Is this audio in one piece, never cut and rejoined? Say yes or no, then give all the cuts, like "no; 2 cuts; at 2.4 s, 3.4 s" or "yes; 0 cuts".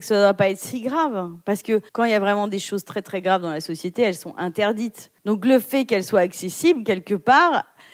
no; 2 cuts; at 1.9 s, 5.2 s